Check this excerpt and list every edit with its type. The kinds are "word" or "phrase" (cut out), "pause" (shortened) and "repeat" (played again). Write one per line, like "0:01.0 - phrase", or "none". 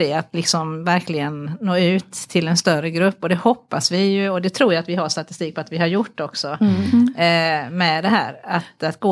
none